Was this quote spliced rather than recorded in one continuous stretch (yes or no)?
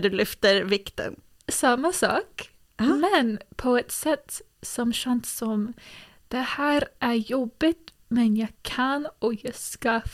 no